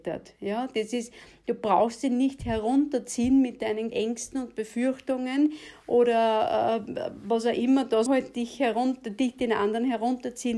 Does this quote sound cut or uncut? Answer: cut